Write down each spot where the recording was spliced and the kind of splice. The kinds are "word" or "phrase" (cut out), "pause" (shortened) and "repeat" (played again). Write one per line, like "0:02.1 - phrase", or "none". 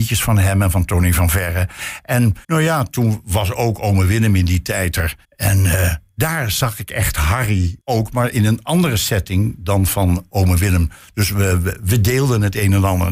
0:02.4 - pause
0:05.2 - pause
0:07.8 - pause